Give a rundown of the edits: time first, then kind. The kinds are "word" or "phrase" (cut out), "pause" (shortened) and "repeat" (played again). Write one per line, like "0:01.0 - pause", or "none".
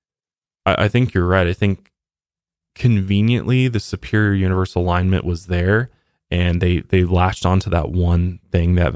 none

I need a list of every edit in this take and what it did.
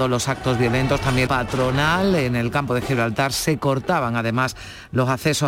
0:01.3 - phrase

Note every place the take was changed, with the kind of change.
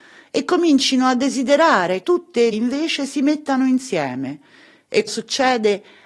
0:02.0 - word
0:02.5 - word
0:05.1 - word

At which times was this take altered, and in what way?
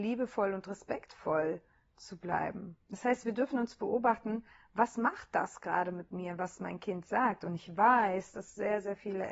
0:02.8 - pause

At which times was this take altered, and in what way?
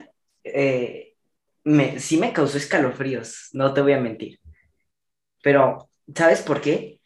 none

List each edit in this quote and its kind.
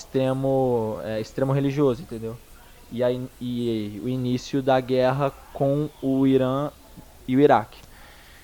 none

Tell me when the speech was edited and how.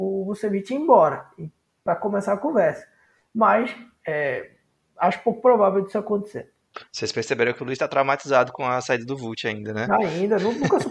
none

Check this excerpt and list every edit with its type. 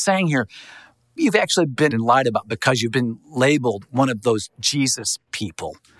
0:01.2 - word
0:01.9 - word

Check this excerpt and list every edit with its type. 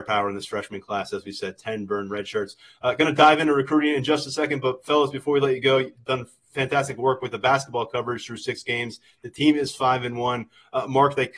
none

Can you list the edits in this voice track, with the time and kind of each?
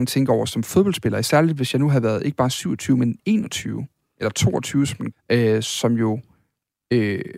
0:05.1 - phrase

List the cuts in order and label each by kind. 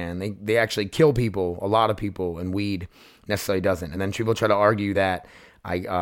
none

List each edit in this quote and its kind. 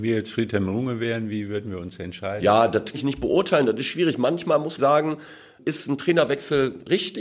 0:02.9 - word
0:04.8 - phrase

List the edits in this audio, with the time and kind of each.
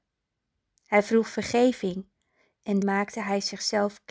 0:02.8 - word

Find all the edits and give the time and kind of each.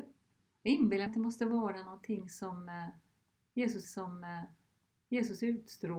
0:01.1 - word
0:03.8 - repeat

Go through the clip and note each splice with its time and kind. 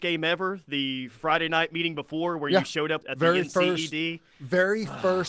0:03.0 - word

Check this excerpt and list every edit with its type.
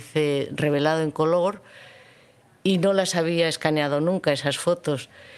none

